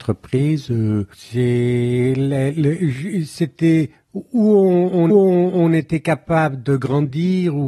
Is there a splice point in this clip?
yes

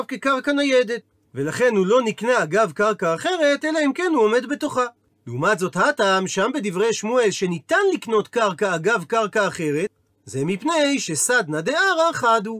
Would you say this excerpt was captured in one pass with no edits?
yes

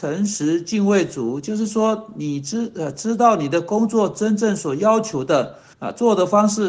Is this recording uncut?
no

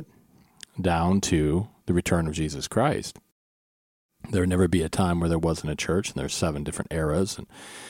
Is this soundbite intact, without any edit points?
yes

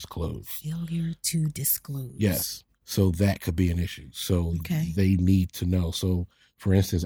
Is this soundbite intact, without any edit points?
no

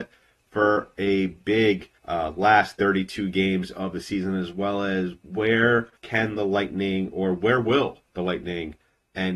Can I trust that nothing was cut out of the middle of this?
no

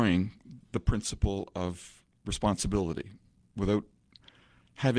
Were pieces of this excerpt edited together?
no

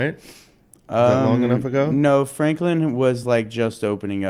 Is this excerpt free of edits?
yes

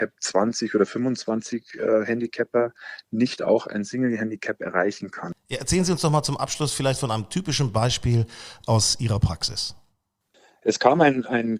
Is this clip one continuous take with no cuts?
yes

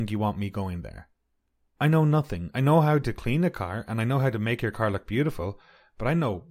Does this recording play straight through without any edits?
yes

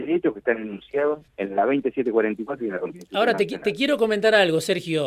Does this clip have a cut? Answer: yes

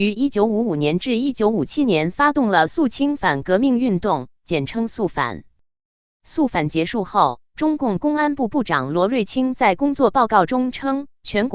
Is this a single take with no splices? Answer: yes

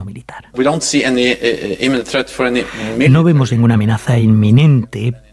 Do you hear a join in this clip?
no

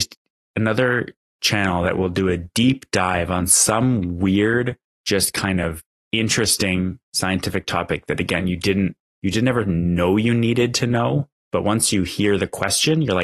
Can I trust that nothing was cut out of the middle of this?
yes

